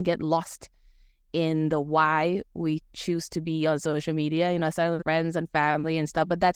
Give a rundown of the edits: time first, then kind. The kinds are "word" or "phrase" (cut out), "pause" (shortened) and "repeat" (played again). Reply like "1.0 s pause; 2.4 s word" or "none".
5.0 s word